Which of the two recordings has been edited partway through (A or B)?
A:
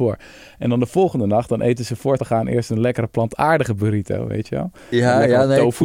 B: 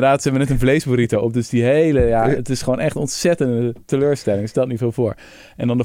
A